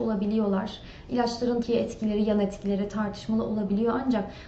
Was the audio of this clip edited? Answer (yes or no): yes